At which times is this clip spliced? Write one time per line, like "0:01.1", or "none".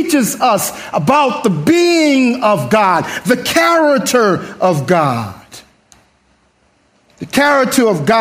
none